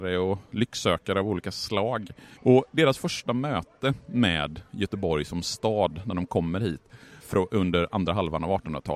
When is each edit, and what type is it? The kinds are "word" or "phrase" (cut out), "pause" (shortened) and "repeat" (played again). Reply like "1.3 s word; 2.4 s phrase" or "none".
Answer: 2.4 s pause; 7.2 s pause